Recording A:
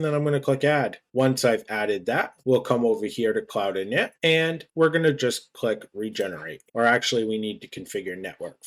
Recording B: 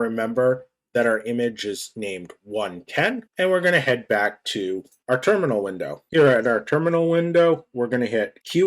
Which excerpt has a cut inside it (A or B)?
A